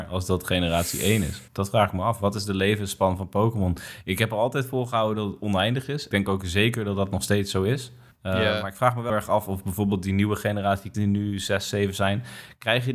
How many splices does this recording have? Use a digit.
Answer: 5